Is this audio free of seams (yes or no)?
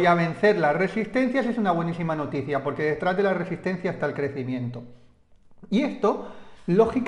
yes